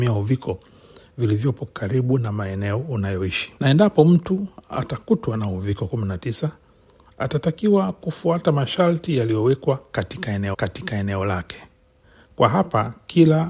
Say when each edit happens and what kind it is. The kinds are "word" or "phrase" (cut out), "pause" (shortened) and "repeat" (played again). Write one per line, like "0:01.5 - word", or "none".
0:03.6 - pause
0:10.5 - repeat